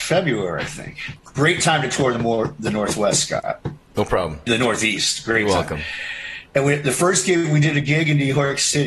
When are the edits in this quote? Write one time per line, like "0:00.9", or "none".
0:04.5